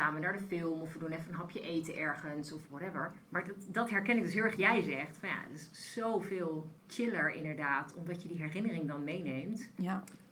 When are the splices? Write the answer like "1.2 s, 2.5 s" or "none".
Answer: 3.2 s, 4.6 s, 6.8 s